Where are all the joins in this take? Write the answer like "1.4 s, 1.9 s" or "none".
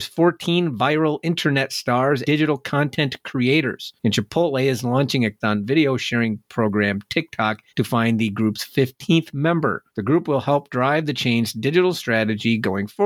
2.2 s, 4.0 s, 5.4 s, 7.7 s, 9.9 s